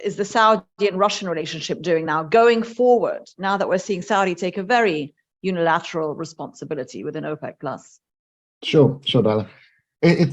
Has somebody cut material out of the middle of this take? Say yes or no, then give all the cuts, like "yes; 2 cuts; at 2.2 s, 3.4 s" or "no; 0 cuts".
no; 0 cuts